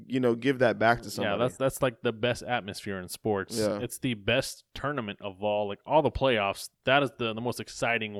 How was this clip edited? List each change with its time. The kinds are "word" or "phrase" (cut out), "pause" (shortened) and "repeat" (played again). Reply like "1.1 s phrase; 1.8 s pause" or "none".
6.7 s pause